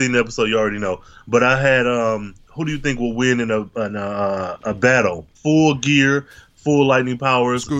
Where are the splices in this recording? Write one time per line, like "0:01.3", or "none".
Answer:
0:05.4